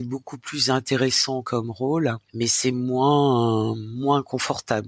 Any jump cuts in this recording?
no; 0 cuts

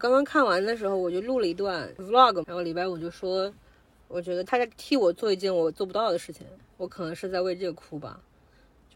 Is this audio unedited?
no; 1 cut; at 2.4 s

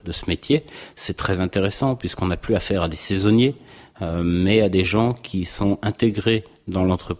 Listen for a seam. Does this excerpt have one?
no; 0 cuts

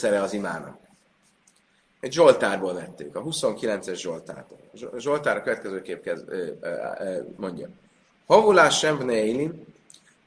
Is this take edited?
no; 0 cuts

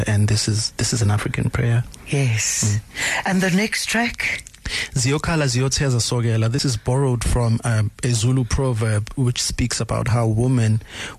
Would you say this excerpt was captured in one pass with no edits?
yes; 0 cuts

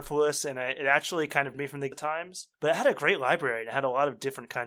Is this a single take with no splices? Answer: no; 3 cuts; at 1.5 s, 1.9 s, 2.5 s

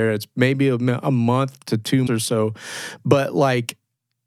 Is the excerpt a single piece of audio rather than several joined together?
no; 1 cut; at 2.1 s

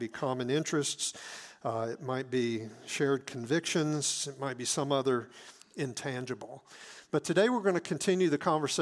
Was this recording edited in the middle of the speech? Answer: no; 0 cuts

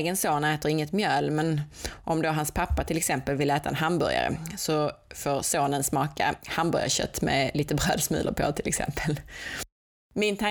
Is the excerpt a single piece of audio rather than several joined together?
yes; 0 cuts

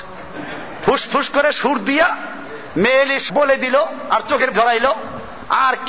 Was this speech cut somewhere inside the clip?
yes; 2 cuts; at 3.3 s, 4.5 s

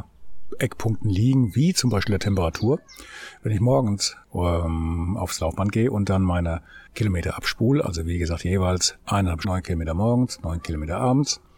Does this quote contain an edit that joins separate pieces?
yes; 3 cuts; at 4.2 s, 6.9 s, 9.4 s

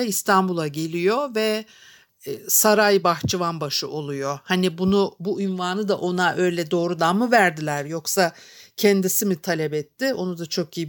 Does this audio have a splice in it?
no; 0 cuts

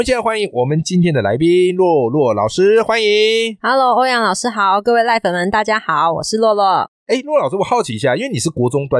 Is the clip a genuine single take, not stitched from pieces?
no; 1 cut; at 7.0 s

